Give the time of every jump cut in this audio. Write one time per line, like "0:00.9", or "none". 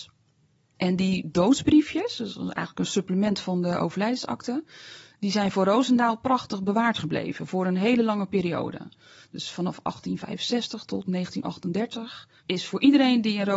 0:12.4